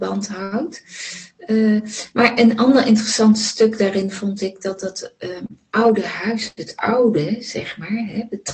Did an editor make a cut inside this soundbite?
no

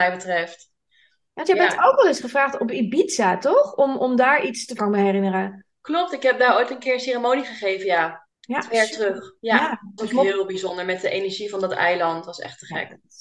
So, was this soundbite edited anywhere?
yes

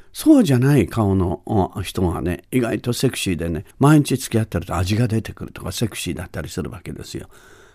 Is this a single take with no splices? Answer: no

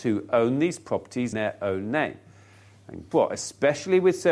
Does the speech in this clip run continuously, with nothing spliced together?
no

